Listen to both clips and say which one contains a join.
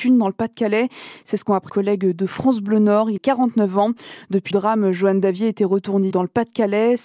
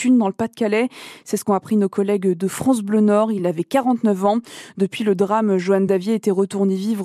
first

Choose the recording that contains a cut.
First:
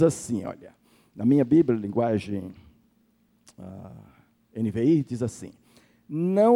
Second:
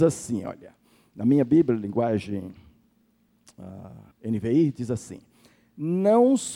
second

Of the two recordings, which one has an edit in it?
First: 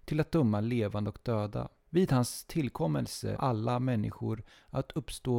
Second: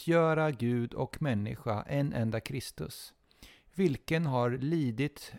first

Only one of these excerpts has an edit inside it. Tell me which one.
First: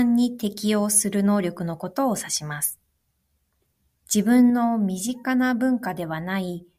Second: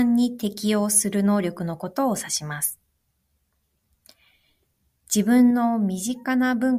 first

